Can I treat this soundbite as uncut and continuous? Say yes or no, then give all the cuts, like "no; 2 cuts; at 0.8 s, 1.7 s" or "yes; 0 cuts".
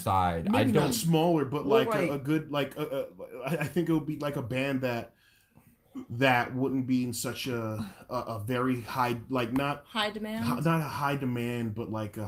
yes; 0 cuts